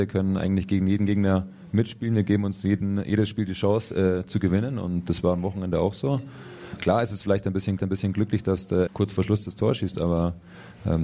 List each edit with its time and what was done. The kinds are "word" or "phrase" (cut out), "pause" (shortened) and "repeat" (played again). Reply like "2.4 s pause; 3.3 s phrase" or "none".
7.8 s repeat; 8.9 s word